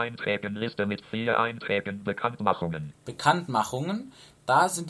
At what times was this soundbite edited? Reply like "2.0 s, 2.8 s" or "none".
none